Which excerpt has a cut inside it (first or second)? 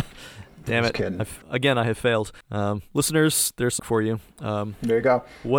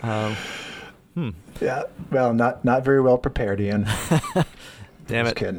first